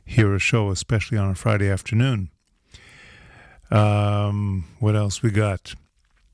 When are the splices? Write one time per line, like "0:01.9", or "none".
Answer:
none